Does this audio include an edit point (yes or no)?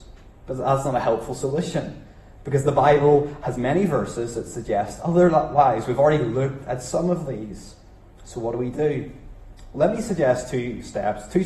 no